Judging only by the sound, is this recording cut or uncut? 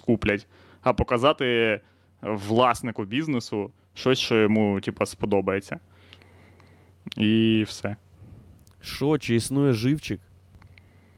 uncut